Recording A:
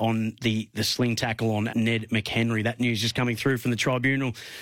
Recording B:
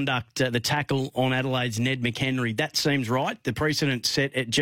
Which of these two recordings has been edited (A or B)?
A